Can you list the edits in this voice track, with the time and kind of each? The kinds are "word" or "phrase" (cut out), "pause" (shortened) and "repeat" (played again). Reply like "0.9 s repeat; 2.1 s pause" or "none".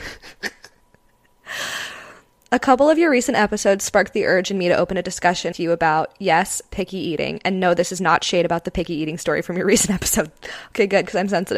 5.5 s word